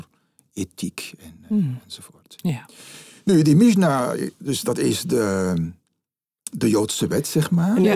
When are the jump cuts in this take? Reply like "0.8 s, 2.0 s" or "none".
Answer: none